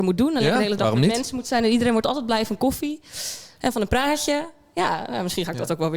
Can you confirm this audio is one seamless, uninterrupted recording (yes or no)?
yes